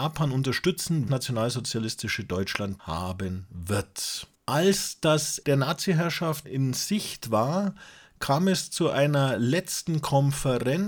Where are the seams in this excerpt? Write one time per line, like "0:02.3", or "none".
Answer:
0:01.1
0:02.8
0:04.3
0:05.4
0:06.4